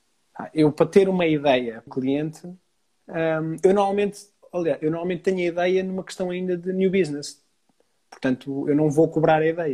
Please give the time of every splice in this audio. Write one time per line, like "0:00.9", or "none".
0:01.9